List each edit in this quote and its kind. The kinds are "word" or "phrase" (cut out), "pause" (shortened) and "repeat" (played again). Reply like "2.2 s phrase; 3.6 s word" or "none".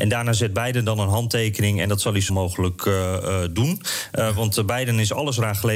2.3 s word